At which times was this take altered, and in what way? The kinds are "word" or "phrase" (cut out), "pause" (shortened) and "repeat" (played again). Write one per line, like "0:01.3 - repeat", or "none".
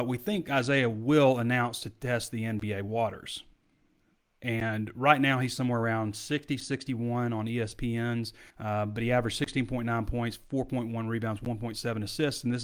0:08.5 - pause